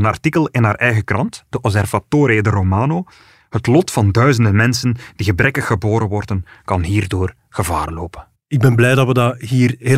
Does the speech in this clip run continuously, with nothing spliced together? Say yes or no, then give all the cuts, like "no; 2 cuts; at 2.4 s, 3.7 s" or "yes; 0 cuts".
yes; 0 cuts